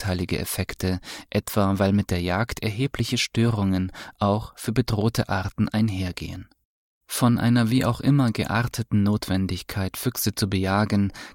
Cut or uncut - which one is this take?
uncut